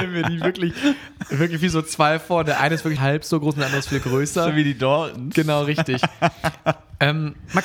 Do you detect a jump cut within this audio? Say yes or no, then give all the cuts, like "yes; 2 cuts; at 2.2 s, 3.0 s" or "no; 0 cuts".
yes; 1 cut; at 3.0 s